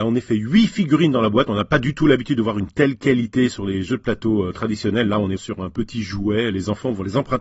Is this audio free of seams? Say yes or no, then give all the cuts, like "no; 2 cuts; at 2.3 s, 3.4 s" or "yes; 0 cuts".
no; 1 cut; at 5.4 s